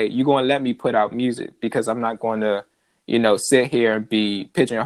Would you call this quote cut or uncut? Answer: uncut